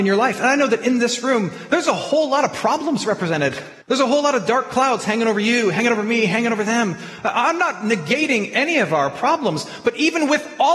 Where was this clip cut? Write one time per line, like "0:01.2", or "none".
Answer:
0:03.8

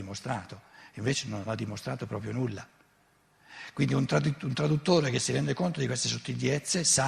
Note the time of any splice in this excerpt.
0:01.5

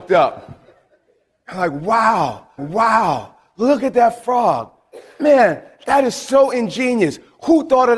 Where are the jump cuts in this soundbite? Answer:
0:02.6

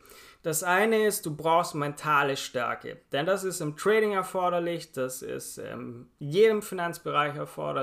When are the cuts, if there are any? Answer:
0:06.1

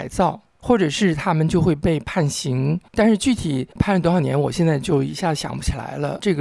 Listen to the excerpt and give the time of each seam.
0:02.9
0:03.7

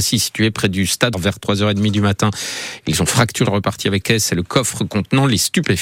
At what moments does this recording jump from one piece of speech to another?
0:01.1
0:03.4
0:04.0

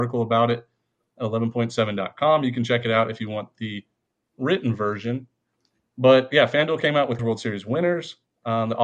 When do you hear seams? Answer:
0:07.2

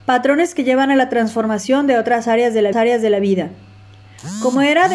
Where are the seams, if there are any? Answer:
0:02.7

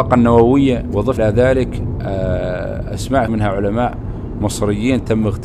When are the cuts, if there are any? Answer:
0:01.2
0:03.3

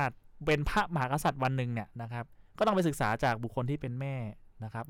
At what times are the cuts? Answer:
none

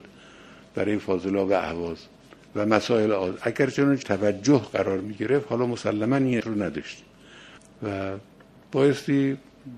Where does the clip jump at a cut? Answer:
0:04.0
0:06.4

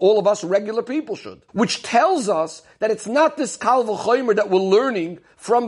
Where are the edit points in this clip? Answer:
0:01.5

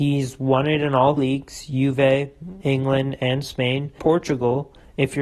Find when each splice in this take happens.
0:01.2
0:02.6
0:04.0

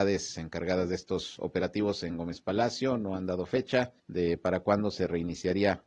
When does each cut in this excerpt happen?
0:04.0

